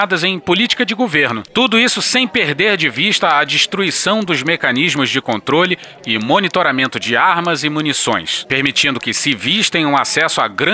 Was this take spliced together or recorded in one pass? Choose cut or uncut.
uncut